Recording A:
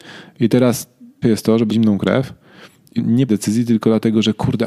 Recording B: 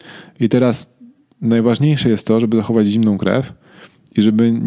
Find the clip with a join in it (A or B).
A